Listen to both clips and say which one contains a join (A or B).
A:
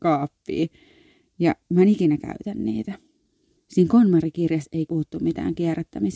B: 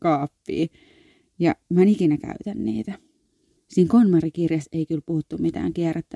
A